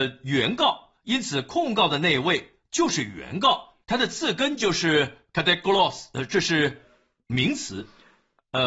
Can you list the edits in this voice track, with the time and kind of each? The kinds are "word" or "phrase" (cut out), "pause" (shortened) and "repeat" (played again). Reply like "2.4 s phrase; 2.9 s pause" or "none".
3.8 s pause